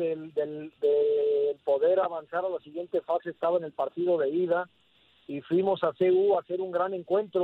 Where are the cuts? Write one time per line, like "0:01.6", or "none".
none